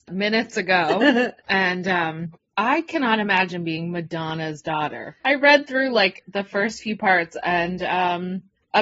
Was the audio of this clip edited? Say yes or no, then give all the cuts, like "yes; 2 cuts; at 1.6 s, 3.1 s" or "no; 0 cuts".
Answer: no; 0 cuts